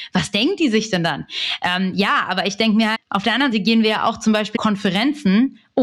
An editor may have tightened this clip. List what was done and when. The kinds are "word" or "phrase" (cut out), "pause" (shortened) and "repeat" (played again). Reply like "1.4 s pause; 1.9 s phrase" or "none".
2.9 s word; 3.5 s word; 4.6 s word